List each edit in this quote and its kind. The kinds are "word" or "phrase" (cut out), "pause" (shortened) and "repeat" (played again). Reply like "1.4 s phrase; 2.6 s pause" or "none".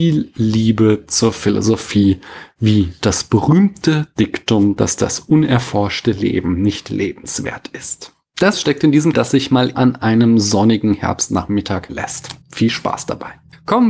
8.5 s word; 9.1 s phrase; 9.7 s word; 11.9 s word; 12.4 s pause